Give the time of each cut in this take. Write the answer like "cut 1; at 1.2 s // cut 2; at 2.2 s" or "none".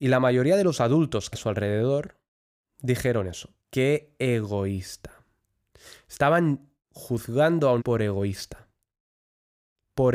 cut 1; at 1.3 s // cut 2; at 3.6 s // cut 3; at 6.8 s // cut 4; at 7.8 s